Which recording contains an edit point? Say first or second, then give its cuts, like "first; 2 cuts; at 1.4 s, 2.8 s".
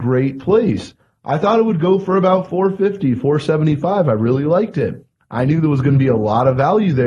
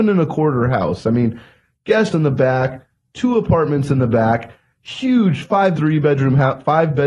second; 2 cuts; at 2.1 s, 5.8 s